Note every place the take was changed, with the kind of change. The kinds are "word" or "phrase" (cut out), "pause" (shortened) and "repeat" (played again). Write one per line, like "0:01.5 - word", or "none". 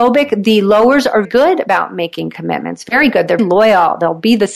0:01.2 - word
0:03.4 - word